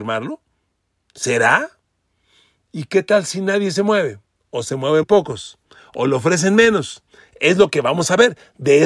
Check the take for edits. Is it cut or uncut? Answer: cut